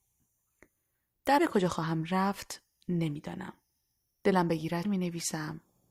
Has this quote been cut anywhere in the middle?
yes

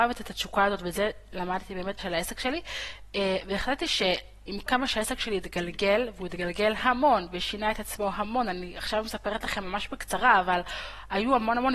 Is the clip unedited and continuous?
no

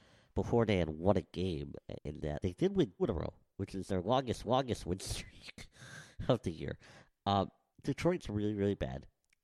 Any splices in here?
yes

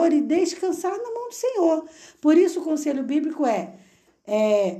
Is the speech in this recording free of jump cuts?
yes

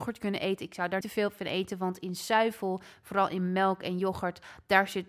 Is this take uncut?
no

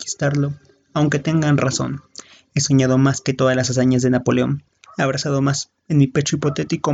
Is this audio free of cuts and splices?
yes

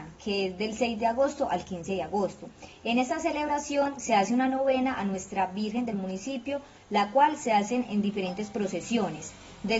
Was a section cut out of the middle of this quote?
no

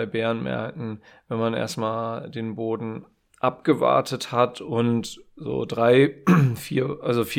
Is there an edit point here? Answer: no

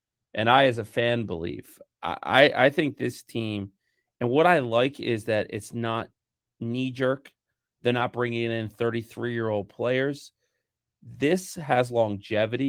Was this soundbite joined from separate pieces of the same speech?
no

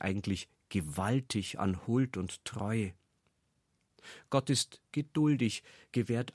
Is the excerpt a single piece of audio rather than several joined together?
yes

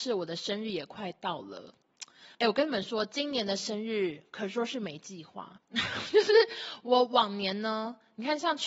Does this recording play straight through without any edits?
no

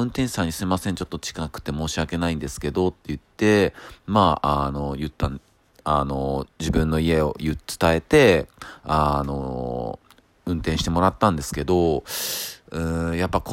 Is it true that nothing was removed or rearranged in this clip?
no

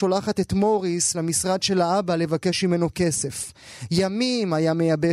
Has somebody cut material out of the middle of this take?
no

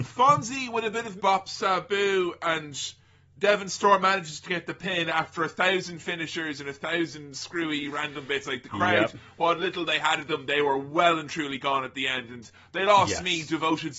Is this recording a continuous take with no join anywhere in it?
no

